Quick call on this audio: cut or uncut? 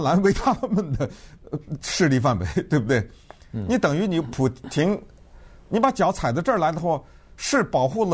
uncut